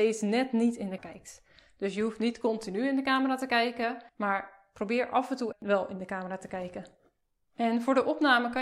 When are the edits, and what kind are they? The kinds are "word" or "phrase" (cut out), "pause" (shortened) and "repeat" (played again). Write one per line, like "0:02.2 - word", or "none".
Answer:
0:01.0 - word
0:04.1 - pause
0:05.5 - word